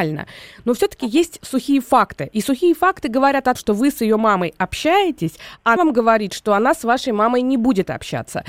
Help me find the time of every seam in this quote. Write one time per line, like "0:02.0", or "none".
0:03.6
0:05.8

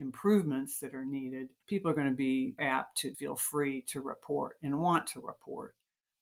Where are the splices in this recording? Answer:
0:01.6
0:02.6
0:03.1

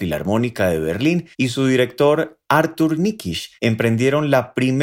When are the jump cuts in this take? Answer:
0:01.3
0:03.6

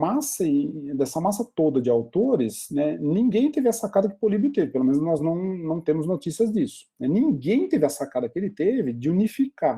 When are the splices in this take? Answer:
none

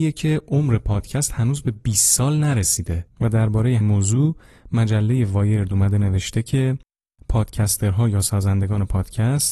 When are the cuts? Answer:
0:03.8

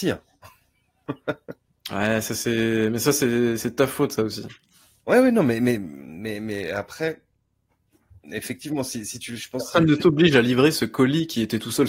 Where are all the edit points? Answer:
none

